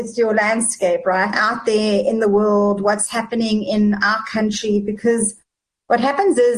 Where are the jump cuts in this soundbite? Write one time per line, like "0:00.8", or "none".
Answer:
0:01.3